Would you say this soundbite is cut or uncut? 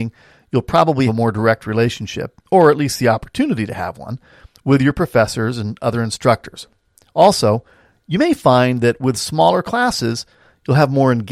cut